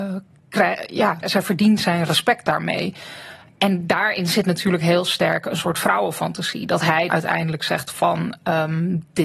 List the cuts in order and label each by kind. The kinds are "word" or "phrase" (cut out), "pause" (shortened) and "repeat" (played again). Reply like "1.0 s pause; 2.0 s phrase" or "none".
1.2 s word; 7.1 s word